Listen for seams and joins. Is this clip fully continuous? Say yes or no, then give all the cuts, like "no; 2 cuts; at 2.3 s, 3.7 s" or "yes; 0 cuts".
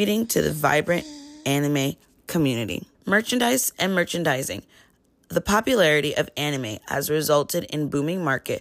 no; 1 cut; at 2.9 s